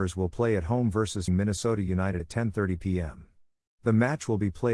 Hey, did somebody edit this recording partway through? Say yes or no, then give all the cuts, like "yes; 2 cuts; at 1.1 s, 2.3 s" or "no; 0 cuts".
yes; 2 cuts; at 1.3 s, 2.2 s